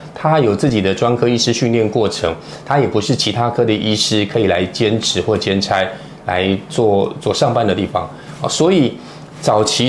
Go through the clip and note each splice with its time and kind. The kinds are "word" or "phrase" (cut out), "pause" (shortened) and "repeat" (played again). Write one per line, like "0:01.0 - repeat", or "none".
none